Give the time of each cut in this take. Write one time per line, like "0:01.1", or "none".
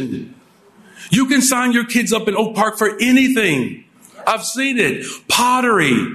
none